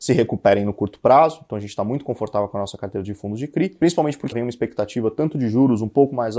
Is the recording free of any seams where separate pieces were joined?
no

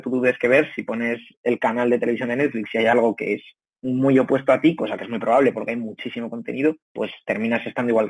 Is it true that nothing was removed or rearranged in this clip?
no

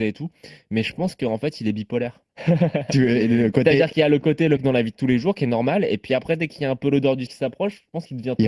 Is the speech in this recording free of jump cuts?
no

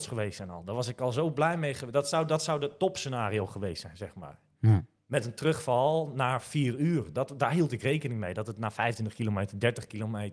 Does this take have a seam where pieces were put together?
no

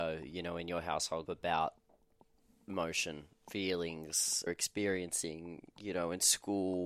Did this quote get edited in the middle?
yes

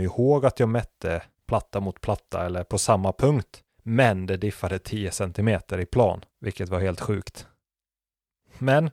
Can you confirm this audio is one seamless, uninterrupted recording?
no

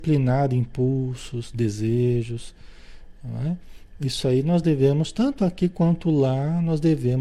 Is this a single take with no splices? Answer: yes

